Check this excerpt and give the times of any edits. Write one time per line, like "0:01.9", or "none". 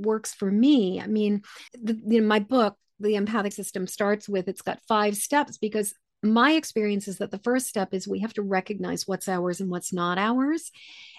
0:01.7
0:03.5